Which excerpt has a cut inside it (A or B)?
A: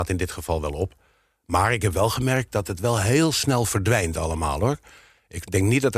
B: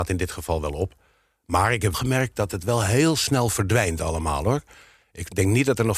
B